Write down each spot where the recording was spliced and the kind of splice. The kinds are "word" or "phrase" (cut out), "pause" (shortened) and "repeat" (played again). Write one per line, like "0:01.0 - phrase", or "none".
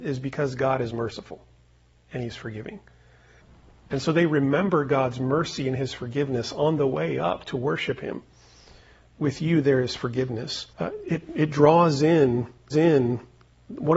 0:10.7 - pause
0:12.7 - repeat